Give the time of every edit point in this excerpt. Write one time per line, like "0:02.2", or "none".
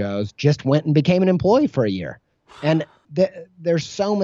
0:03.0

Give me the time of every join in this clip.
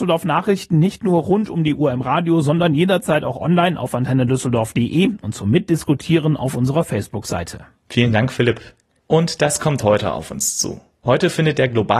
none

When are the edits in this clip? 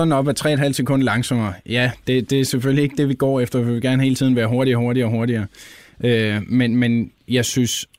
none

